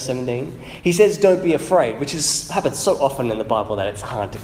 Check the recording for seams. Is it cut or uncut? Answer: uncut